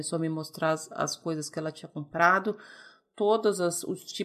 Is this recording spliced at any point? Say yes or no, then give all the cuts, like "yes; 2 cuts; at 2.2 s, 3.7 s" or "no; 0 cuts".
no; 0 cuts